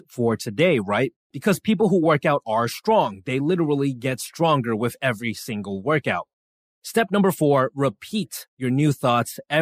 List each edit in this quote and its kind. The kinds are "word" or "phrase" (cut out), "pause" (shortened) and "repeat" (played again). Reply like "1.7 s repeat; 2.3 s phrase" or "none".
none